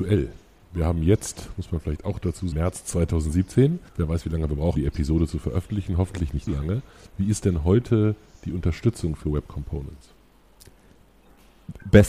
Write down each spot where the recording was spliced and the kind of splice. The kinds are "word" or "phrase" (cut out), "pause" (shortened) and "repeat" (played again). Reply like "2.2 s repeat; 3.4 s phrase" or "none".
2.5 s word; 3.9 s pause; 4.8 s word; 6.5 s word